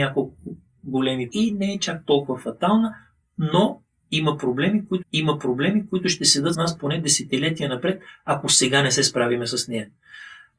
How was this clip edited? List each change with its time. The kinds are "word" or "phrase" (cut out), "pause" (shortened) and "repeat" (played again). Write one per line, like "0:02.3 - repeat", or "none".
0:01.3 - word
0:05.0 - repeat
0:06.5 - word